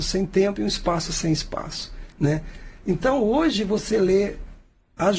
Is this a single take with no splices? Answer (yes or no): yes